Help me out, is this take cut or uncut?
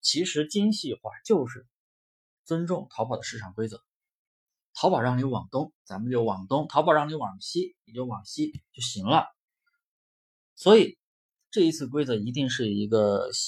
cut